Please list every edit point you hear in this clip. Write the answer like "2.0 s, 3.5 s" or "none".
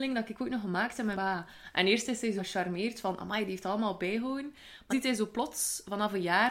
1.1 s, 2.4 s, 4.9 s